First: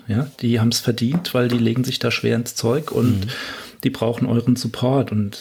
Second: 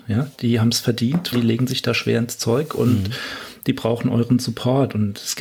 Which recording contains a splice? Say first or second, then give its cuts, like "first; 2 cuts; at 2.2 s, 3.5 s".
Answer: second; 1 cut; at 1.3 s